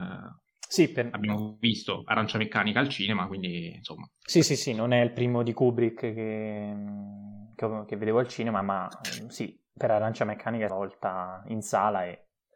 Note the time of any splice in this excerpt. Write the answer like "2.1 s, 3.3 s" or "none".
7.5 s, 10.7 s